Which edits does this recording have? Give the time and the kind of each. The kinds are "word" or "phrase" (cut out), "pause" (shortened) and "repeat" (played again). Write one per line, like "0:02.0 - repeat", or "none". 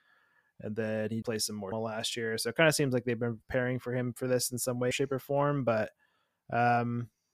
0:01.2 - word
0:01.7 - phrase
0:04.9 - word